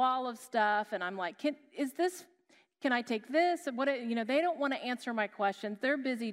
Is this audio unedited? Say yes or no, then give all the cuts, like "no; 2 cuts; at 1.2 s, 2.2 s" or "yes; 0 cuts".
yes; 0 cuts